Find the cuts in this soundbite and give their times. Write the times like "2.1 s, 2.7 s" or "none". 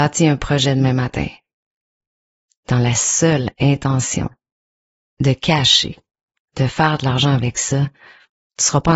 none